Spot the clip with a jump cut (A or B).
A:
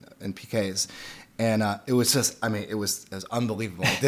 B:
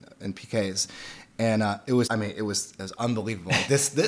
B